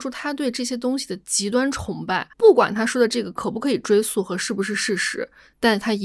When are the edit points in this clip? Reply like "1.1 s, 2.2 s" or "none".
2.3 s